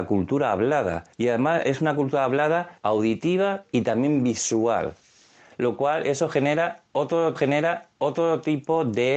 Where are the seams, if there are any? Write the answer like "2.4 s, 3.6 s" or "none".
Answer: 1.1 s, 2.8 s, 7.4 s